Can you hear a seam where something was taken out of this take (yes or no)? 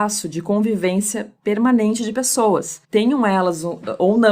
yes